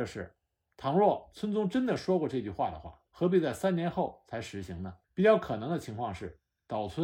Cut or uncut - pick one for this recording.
cut